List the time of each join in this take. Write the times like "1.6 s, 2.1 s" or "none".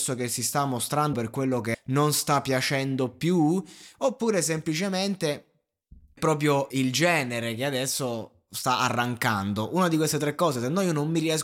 1.1 s, 1.7 s, 6.2 s, 6.7 s